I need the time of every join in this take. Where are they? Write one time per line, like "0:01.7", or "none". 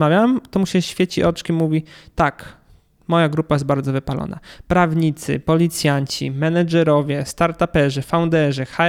none

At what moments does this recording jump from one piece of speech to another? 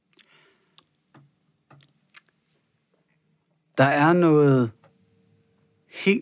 none

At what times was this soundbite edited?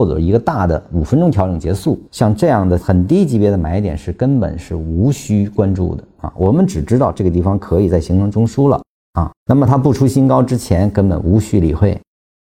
0:02.1
0:09.4

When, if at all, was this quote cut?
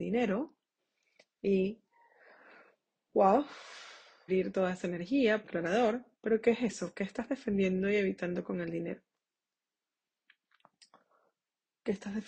0:04.3
0:05.4
0:06.1

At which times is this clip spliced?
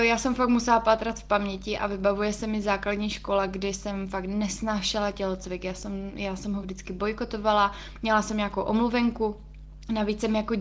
none

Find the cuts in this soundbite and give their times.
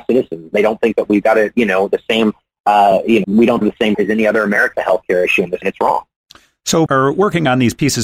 0:03.2
0:03.6
0:03.9
0:04.7
0:05.6
0:06.9

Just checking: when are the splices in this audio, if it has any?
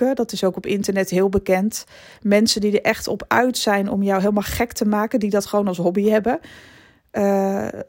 none

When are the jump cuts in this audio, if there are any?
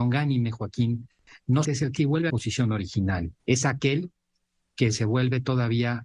0:01.6
0:02.0
0:02.3
0:03.4

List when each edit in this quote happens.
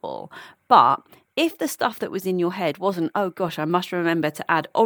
none

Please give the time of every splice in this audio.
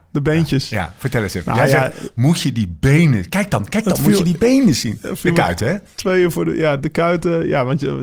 0:06.8

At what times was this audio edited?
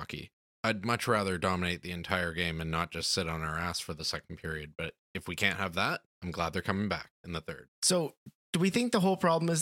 0:06.1
0:07.1
0:07.7

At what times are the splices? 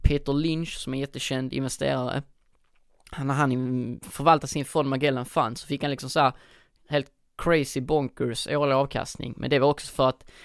none

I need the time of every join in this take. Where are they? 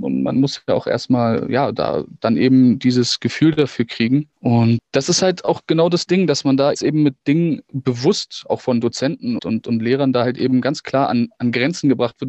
0:06.7
0:09.4

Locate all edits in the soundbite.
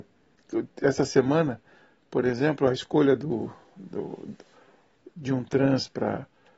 none

